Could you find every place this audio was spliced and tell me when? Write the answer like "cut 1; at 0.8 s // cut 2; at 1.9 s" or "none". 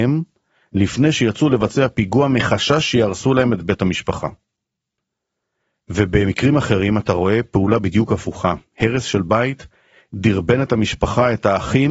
none